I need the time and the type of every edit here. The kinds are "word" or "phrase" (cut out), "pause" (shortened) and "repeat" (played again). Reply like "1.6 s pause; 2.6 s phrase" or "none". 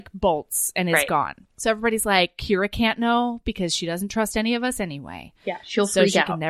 1.4 s pause